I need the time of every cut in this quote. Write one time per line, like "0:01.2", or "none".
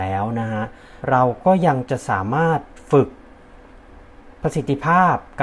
0:01.0